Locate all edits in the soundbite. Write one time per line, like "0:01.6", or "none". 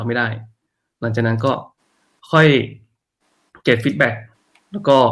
none